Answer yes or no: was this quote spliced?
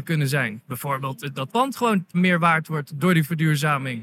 yes